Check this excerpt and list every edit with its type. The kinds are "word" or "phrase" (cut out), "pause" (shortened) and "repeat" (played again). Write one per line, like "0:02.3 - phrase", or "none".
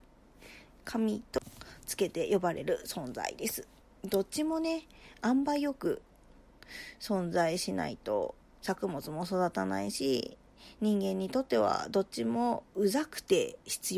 0:03.8 - pause
0:08.4 - pause